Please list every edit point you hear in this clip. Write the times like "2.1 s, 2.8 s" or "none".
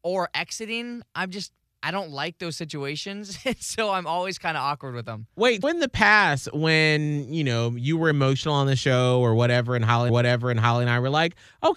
1.6 s, 5.6 s, 10.1 s